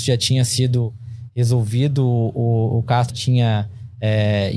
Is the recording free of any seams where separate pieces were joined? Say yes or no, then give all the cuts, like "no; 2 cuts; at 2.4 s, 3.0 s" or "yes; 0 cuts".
no; 1 cut; at 3.1 s